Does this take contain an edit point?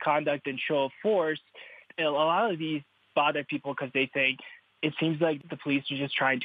no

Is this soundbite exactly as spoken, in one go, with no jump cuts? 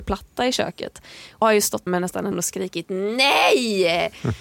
no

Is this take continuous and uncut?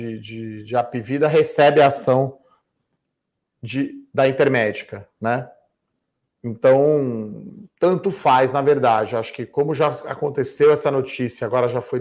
yes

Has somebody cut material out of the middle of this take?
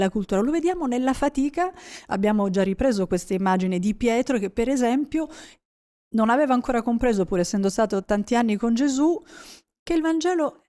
no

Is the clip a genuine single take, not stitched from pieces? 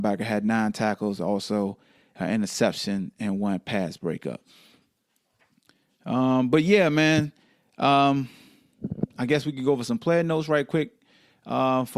yes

